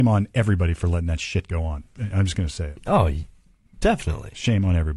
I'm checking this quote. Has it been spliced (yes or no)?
no